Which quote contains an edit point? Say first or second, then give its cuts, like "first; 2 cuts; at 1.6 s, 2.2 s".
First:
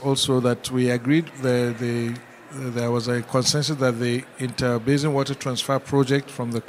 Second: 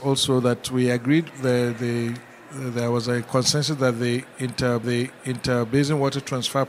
second; 1 cut; at 4.8 s